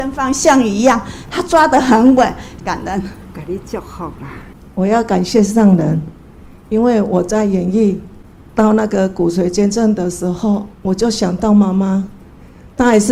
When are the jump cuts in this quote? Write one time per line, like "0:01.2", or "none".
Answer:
0:10.7